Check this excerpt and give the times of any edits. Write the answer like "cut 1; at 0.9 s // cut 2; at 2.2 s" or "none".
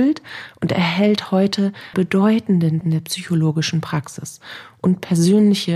cut 1; at 1.9 s // cut 2; at 2.8 s